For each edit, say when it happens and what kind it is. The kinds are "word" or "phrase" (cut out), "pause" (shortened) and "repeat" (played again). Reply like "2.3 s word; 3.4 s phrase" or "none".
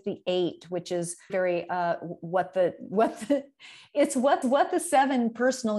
1.3 s word; 4.4 s repeat

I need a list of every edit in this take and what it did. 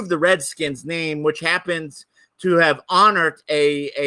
none

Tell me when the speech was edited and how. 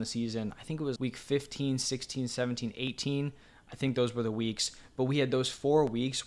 1.0 s word

